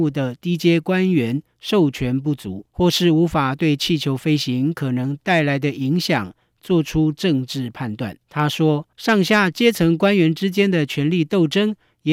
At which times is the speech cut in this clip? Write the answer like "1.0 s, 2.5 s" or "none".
2.7 s, 8.2 s, 8.9 s